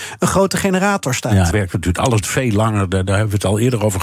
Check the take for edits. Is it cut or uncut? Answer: cut